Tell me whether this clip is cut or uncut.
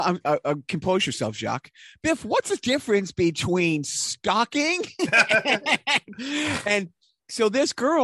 uncut